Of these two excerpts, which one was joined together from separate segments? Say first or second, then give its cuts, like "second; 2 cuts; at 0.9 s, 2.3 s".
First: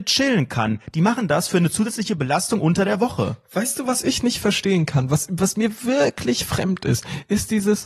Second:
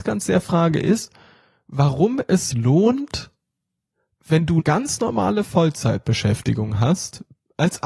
second; 2 cuts; at 2.5 s, 4.6 s